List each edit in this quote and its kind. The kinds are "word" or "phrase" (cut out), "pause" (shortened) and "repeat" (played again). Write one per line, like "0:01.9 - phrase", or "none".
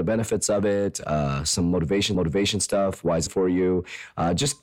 0:02.1 - repeat
0:03.3 - phrase